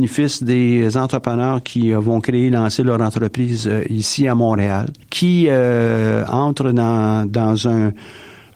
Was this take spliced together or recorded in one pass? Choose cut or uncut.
cut